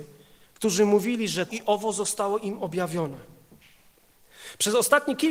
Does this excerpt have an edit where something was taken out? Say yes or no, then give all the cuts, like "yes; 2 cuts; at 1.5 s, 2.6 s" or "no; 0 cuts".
yes; 1 cut; at 1.5 s